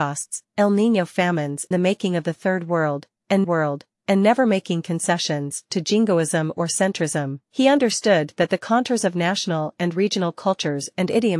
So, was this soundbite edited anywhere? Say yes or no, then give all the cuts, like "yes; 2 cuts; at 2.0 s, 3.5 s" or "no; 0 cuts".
yes; 3 cuts; at 1.7 s, 3.4 s, 7.4 s